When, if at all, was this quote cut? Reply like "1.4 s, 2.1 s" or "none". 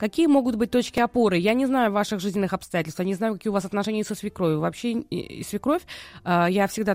none